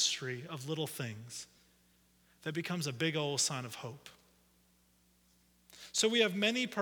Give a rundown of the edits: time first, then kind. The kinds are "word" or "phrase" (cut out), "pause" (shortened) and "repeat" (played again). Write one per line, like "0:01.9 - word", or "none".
none